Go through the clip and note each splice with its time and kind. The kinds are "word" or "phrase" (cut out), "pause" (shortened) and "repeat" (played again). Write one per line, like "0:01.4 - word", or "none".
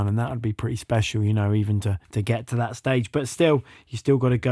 0:02.0 - pause